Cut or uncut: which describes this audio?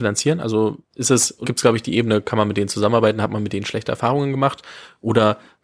cut